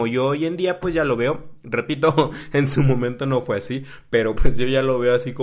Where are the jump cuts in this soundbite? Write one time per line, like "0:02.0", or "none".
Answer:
none